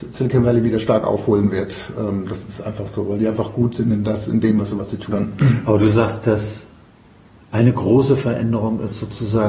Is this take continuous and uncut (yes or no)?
yes